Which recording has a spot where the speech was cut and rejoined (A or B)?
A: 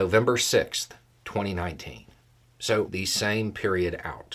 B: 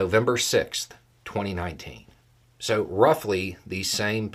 A